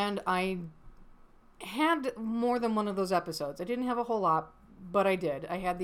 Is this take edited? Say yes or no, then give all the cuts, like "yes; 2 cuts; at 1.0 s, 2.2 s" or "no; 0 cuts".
no; 0 cuts